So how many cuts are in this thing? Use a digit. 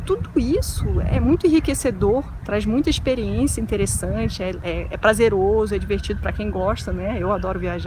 0